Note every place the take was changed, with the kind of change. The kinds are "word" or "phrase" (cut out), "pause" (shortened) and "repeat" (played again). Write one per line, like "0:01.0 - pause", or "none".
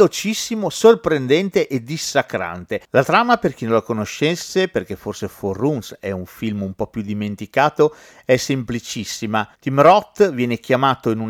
0:02.8 - pause